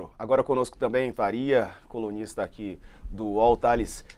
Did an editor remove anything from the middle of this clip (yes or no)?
yes